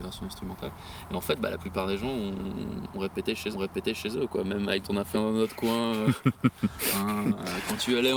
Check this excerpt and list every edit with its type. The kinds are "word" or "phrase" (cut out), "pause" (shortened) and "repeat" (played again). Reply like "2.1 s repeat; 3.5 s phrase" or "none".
3.5 s repeat; 4.8 s word; 5.1 s word